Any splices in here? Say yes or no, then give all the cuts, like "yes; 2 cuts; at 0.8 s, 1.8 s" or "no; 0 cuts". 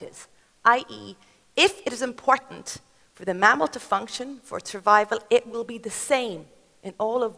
no; 0 cuts